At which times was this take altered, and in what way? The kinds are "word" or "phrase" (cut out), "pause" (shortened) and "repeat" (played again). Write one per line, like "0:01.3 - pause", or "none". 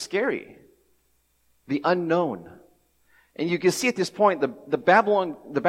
none